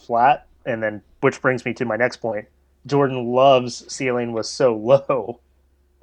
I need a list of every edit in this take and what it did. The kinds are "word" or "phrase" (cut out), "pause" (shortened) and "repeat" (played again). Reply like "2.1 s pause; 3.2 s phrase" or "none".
none